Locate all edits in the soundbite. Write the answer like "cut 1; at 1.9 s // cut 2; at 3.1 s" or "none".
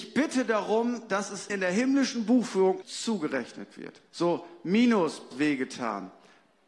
cut 1; at 1.5 s // cut 2; at 2.8 s // cut 3; at 4.1 s // cut 4; at 5.3 s